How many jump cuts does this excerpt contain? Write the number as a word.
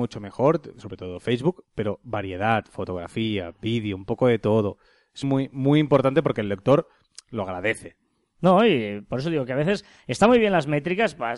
one